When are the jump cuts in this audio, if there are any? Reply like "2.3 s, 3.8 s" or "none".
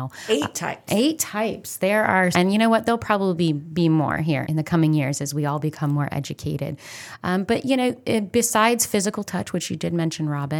2.3 s, 4.4 s